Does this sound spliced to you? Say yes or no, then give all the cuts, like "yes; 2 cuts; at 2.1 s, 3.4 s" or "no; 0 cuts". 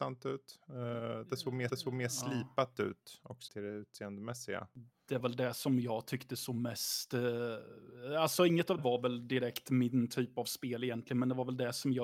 yes; 4 cuts; at 1.7 s, 3.5 s, 5.2 s, 8.8 s